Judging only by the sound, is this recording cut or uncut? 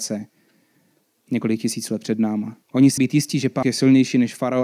cut